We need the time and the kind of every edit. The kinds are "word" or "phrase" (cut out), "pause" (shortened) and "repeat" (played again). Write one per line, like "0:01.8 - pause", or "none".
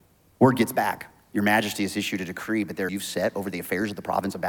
0:02.9 - phrase